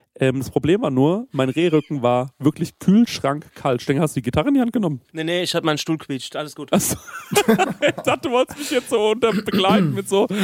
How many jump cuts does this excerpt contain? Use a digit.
1